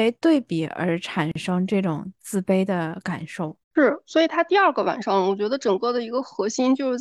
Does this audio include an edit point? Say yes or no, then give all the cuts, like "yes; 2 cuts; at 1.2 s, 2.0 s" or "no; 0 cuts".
yes; 1 cut; at 3.6 s